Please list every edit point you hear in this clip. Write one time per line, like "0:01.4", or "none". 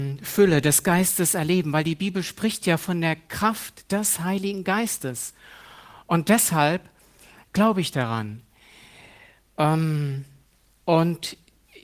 none